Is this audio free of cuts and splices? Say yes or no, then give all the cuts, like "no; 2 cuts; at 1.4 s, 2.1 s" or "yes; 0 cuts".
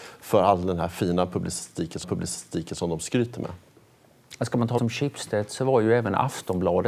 no; 2 cuts; at 2.0 s, 4.8 s